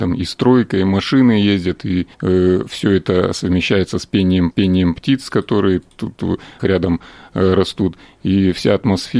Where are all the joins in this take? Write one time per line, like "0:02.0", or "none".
0:02.1
0:04.5
0:06.6